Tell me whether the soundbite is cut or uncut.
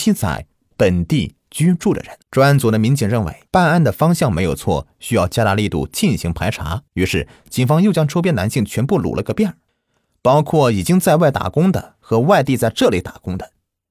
cut